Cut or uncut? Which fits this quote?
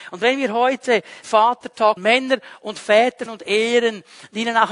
cut